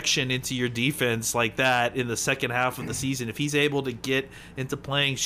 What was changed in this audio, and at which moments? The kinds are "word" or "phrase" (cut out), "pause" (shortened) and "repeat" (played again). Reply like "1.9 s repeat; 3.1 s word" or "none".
none